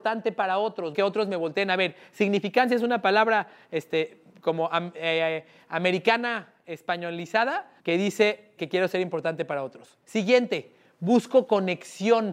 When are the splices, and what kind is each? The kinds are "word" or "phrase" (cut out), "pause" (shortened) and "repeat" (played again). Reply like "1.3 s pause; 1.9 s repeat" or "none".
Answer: 0.9 s phrase; 7.8 s pause; 8.6 s word; 10.0 s pause

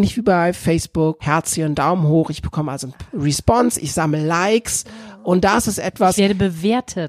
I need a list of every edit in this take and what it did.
1.2 s phrase

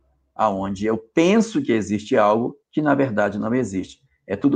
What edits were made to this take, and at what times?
2.6 s pause

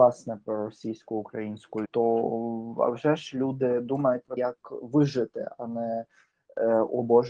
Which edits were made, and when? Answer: 1.8 s word; 4.4 s word

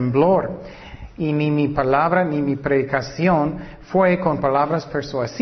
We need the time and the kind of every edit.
none

